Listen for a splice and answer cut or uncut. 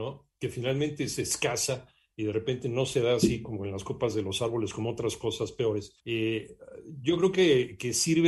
uncut